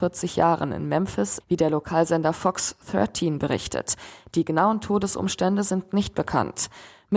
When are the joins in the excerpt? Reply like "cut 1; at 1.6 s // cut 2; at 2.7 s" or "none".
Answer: cut 1; at 1.4 s